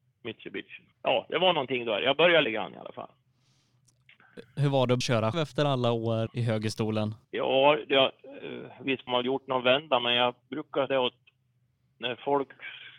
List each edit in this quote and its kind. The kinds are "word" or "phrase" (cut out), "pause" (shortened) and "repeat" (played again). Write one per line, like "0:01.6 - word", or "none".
0:00.9 - pause
0:02.4 - word
0:05.0 - word
0:05.3 - word
0:06.3 - word
0:07.2 - pause
0:09.1 - word
0:10.9 - word